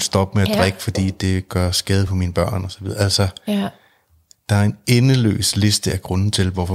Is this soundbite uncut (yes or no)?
yes